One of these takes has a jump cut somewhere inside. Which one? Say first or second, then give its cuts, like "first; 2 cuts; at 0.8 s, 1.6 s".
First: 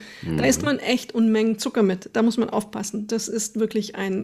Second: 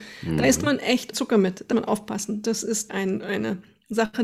second; 3 cuts; at 1.1 s, 1.7 s, 2.9 s